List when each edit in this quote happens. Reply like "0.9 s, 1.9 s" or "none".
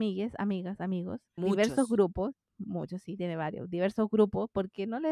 1.4 s